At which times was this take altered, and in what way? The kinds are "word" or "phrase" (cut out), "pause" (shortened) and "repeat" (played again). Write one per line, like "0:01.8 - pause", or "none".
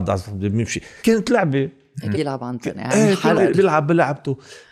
0:01.0 - word
0:02.1 - word
0:02.7 - word
0:03.3 - word